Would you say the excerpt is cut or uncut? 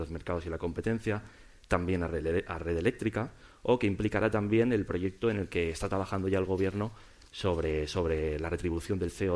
uncut